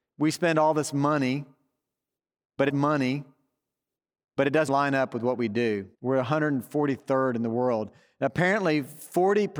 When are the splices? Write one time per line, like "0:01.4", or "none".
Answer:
0:02.7
0:04.7
0:05.9